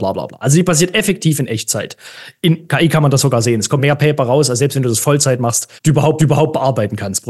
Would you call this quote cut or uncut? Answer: cut